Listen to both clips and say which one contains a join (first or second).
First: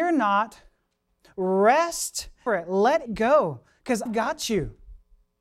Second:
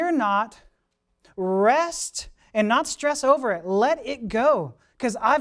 first